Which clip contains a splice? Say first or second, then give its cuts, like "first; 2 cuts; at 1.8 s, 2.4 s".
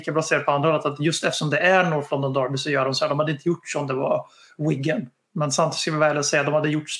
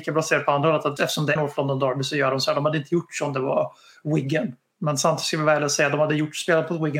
second; 2 cuts; at 1.0 s, 1.4 s